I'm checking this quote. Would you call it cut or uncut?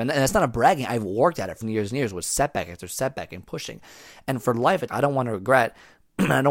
cut